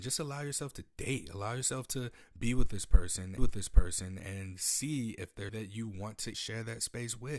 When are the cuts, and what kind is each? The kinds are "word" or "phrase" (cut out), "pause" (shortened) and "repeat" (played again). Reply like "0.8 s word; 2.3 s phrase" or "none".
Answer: 3.4 s repeat; 5.5 s word; 6.3 s word